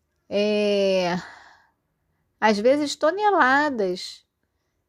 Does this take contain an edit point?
no; 0 cuts

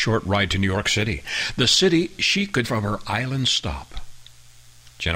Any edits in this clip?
yes; 1 cut; at 2.6 s

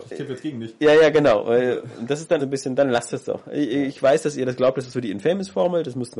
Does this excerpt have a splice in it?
yes; 1 cut; at 2.4 s

